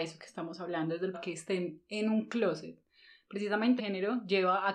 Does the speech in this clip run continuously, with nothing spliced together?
no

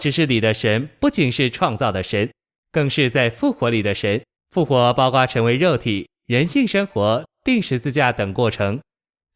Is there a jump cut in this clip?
yes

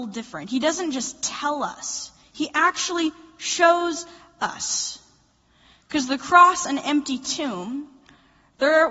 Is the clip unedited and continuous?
yes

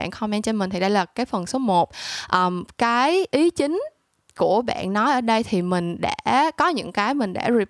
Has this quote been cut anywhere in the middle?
no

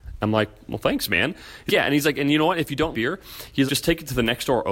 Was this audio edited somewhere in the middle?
yes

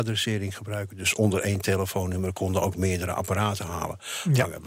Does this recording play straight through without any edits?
yes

